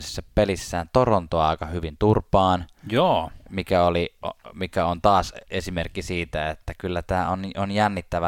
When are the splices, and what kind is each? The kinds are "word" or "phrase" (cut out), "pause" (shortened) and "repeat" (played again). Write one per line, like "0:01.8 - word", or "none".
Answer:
none